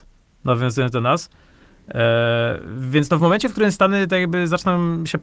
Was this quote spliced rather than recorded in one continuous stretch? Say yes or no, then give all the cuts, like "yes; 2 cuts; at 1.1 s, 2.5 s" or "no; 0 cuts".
no; 0 cuts